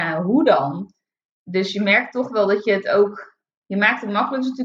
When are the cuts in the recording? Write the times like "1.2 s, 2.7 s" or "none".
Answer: none